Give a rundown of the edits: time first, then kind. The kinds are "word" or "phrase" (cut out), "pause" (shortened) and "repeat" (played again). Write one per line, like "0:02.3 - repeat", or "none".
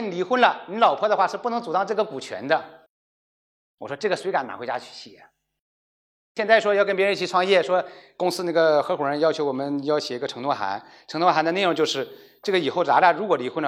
none